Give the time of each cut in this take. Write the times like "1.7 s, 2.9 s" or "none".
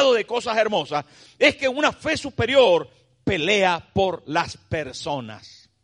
none